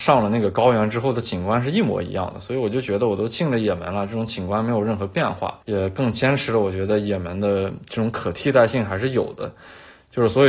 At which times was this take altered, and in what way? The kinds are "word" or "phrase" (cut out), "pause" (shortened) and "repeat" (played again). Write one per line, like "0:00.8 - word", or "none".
0:05.6 - pause